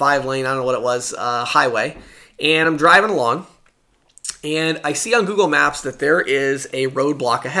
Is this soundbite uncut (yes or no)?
yes